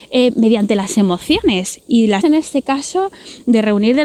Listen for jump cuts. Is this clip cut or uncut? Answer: cut